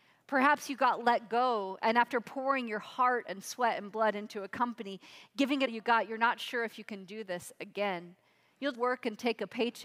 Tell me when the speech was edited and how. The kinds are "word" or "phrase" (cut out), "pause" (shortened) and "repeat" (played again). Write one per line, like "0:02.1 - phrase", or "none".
0:05.7 - word
0:08.7 - word